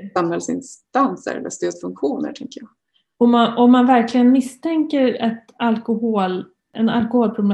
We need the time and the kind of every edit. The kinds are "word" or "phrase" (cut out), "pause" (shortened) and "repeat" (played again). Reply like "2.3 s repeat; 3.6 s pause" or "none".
none